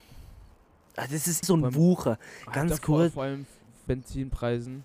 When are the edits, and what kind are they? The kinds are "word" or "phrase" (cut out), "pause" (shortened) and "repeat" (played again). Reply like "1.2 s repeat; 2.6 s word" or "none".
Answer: 1.4 s word; 3.9 s phrase